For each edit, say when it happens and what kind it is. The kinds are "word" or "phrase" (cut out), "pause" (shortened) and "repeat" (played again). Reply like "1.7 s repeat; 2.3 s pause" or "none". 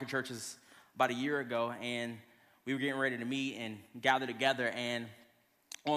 none